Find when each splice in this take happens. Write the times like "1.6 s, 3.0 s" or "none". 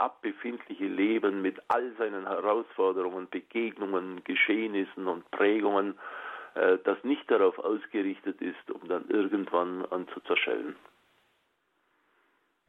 7.0 s, 10.1 s